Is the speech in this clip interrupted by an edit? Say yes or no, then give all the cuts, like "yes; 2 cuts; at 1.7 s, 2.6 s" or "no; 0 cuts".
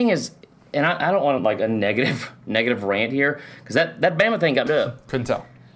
yes; 2 cuts; at 1.4 s, 4.7 s